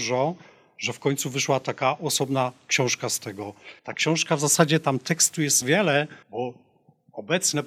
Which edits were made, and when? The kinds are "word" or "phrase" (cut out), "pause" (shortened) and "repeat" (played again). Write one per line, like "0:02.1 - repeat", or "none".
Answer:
0:03.8 - pause
0:05.6 - phrase
0:06.2 - pause